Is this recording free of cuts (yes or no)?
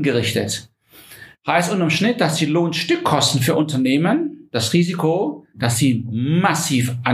yes